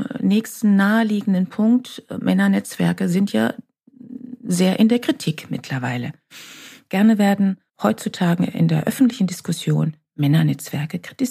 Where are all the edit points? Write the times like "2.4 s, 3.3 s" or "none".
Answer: 7.7 s